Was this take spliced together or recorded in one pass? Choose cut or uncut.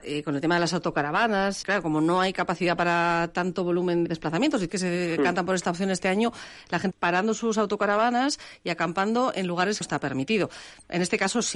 cut